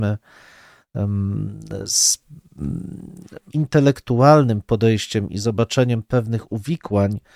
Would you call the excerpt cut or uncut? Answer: cut